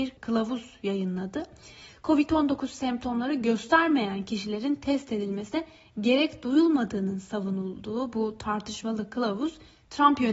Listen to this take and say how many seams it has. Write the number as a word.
zero